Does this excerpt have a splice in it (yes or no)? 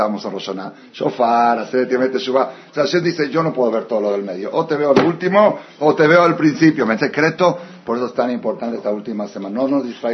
yes